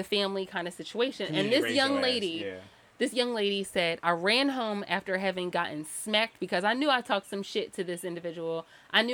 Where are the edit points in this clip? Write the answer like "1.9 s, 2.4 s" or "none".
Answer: none

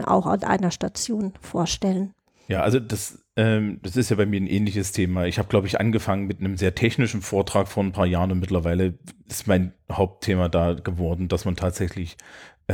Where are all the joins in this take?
none

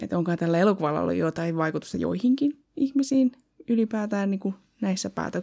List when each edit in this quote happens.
none

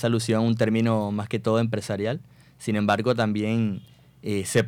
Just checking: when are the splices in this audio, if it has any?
none

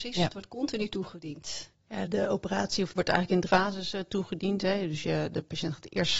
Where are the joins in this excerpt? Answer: 2.1 s, 3.0 s, 3.5 s

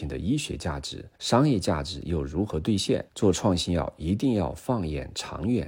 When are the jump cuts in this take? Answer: 1.1 s, 3.1 s

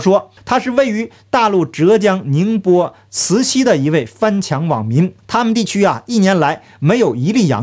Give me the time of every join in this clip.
5.2 s

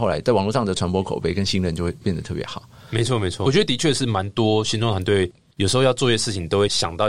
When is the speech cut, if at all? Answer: none

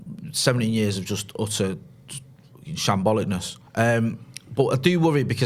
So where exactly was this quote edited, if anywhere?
3.7 s

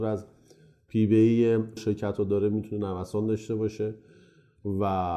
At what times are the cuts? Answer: 1.8 s

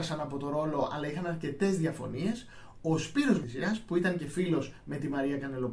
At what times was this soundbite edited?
3.4 s

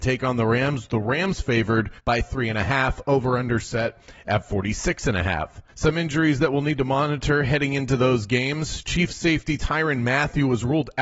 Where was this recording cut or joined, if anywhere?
2.0 s, 5.7 s

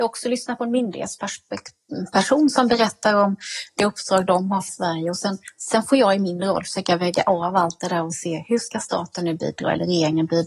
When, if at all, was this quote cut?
4.7 s

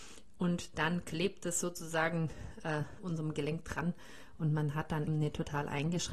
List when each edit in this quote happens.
3.0 s, 5.1 s

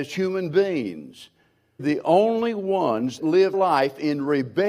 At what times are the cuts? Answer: 1.8 s, 3.2 s, 3.5 s

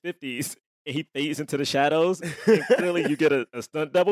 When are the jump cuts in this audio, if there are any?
none

